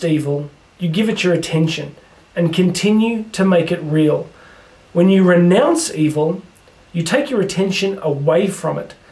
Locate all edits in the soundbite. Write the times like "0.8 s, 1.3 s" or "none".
none